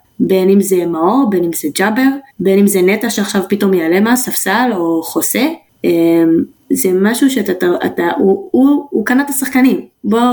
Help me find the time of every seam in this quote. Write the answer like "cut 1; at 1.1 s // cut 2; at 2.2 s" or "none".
cut 1; at 2.3 s